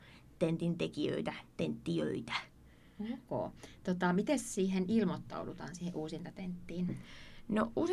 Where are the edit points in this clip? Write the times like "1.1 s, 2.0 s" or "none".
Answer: none